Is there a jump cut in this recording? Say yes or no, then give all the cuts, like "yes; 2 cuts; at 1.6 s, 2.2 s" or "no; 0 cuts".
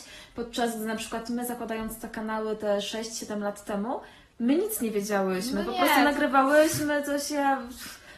no; 0 cuts